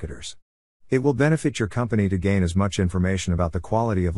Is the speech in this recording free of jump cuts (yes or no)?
yes